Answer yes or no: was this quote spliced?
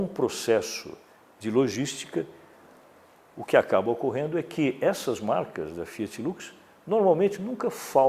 no